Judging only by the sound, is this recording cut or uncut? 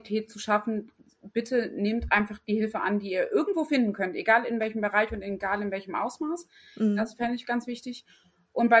uncut